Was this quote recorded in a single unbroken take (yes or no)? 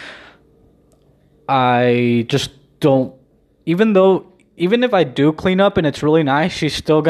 yes